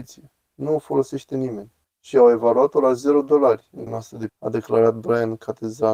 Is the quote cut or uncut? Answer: cut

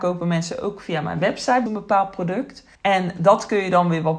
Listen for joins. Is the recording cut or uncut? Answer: cut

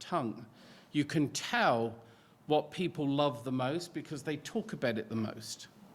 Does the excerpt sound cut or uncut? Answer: uncut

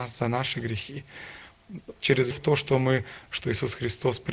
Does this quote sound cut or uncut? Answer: cut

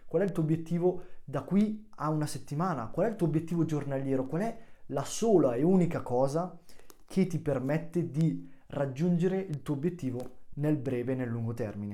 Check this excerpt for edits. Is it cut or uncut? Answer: uncut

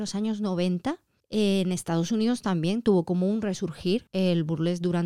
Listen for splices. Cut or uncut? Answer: cut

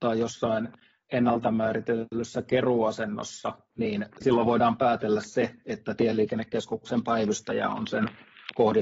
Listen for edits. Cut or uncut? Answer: uncut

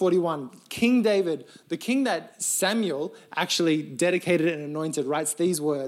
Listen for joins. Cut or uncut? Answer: uncut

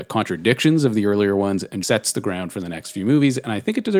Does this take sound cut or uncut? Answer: cut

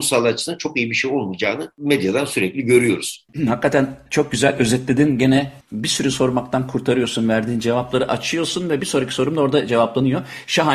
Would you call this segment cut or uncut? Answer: cut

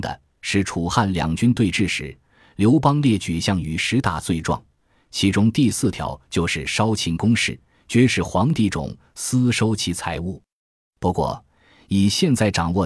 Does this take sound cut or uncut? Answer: uncut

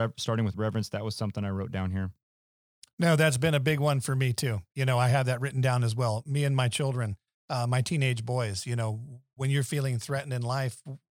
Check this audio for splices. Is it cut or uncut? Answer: uncut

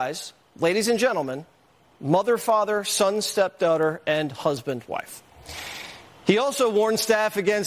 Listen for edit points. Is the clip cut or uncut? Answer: uncut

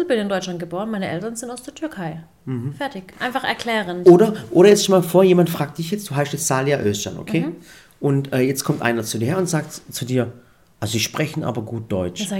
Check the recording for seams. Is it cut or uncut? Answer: uncut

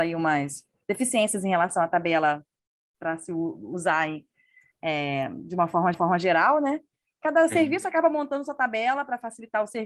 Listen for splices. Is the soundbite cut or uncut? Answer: cut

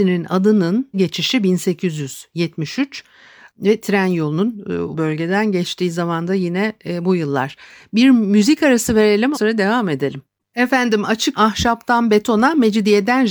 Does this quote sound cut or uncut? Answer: cut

